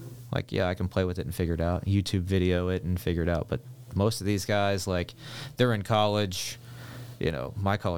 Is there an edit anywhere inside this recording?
no; 0 cuts

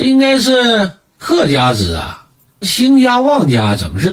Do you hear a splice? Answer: yes; 1 cut; at 2.6 s

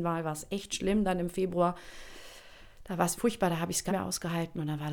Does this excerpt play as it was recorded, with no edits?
no; 2 cuts; at 3.2 s, 3.9 s

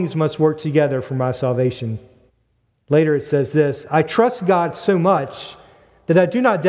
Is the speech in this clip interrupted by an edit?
yes; 1 cut; at 2.3 s

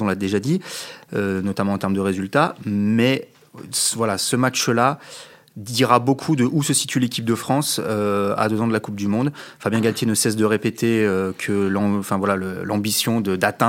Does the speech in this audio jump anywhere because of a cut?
no; 0 cuts

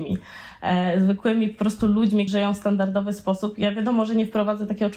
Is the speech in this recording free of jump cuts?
no; 1 cut; at 2.3 s

